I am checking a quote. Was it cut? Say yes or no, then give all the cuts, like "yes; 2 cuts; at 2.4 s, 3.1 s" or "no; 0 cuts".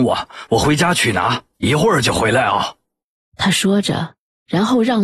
yes; 1 cut; at 2.8 s